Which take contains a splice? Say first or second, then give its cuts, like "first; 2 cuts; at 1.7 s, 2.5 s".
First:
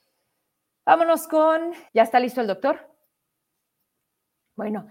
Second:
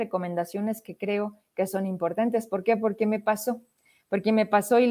first; 1 cut; at 1.9 s